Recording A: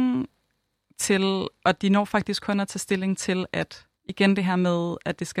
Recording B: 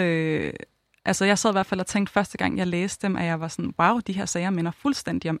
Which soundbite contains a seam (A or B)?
A